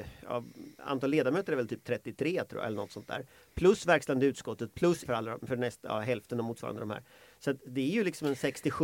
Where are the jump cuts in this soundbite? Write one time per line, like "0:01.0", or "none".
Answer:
0:05.0